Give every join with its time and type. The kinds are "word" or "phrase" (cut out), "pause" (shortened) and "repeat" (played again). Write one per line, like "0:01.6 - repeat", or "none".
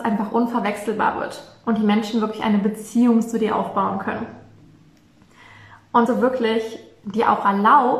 0:06.1 - word